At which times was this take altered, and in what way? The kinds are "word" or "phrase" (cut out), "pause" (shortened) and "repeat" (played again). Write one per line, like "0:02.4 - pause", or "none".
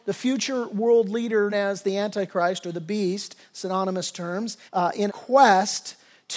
0:01.5 - word
0:04.7 - pause
0:05.1 - phrase